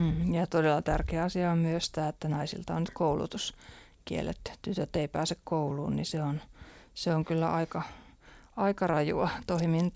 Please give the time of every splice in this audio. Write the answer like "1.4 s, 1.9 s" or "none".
none